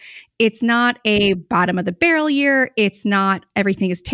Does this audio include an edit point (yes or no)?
no